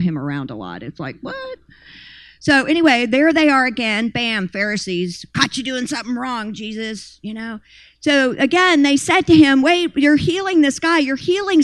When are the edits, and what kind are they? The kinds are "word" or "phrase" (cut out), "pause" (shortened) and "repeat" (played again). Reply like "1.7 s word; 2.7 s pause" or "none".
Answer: none

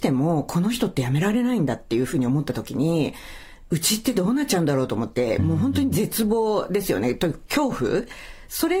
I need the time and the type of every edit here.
none

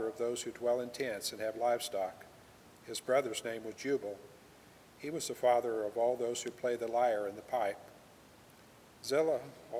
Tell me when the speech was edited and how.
none

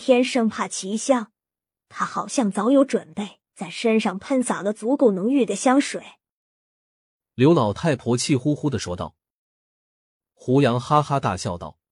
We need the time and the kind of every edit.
3.5 s pause

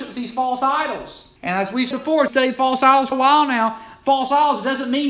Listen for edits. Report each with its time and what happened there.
1.4 s pause; 1.9 s word; 2.3 s word; 3.1 s word

